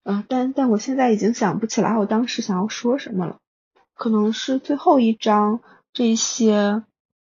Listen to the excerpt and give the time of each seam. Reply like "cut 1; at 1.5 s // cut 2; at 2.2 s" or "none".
none